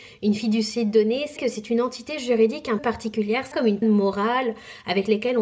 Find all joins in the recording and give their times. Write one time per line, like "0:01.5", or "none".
0:01.4
0:02.8
0:03.5
0:03.8